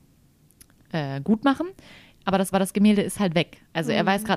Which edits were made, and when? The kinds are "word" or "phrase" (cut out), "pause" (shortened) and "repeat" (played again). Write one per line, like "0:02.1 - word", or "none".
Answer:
0:02.5 - repeat